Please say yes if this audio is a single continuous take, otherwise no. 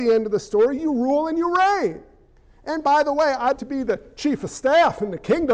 no